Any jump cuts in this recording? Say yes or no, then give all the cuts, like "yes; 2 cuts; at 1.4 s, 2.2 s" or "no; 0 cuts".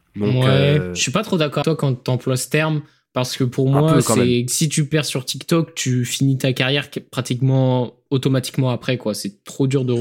yes; 1 cut; at 1.6 s